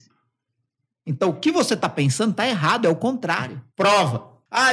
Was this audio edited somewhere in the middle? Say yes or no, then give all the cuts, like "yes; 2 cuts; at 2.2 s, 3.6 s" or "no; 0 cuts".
no; 0 cuts